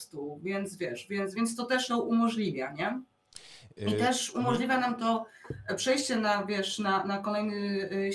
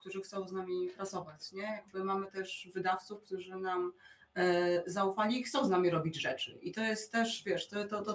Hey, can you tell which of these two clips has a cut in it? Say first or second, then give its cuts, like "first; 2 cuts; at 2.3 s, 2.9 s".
first; 2 cuts; at 1.3 s, 1.9 s